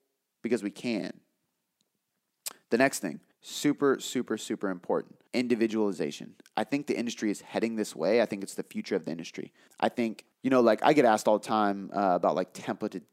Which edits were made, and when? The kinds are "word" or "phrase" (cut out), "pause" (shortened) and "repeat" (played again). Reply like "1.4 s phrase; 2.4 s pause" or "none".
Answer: 3.3 s pause; 5.3 s pause; 9.7 s pause; 10.3 s pause